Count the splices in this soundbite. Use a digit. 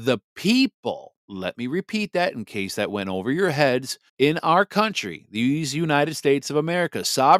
2